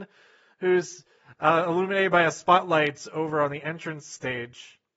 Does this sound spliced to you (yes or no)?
no